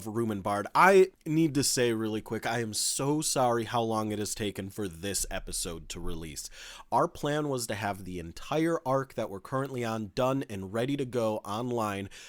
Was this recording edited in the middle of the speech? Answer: yes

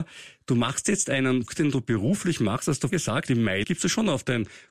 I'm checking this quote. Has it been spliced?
yes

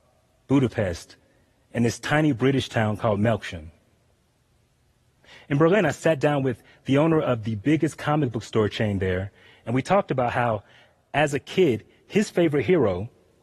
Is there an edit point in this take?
no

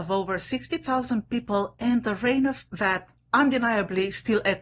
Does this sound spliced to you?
yes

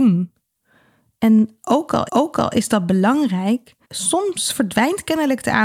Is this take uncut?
no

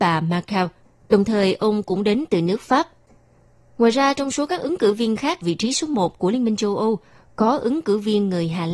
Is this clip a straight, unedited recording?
no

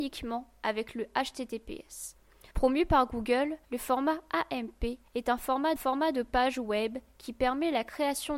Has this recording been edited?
yes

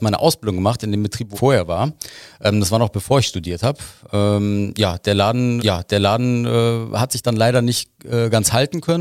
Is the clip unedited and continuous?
no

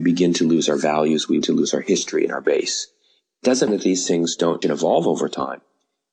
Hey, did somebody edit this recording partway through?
yes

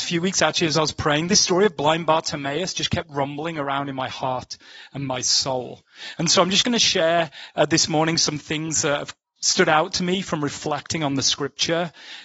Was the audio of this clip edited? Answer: no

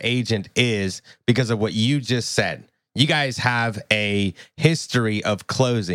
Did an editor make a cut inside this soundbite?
no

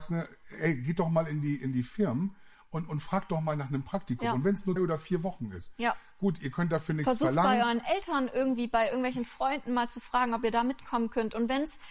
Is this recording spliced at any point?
yes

